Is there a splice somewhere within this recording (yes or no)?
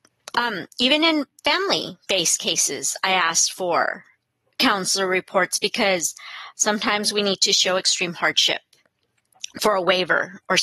no